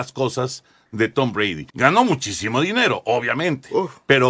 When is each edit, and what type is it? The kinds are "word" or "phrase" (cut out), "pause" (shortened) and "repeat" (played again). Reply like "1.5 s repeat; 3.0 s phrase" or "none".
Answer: 1.7 s pause